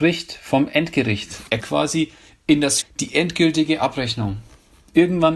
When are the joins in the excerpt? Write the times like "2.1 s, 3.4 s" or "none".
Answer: 1.6 s, 2.8 s